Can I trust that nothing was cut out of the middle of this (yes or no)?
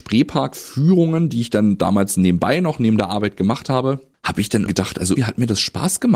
no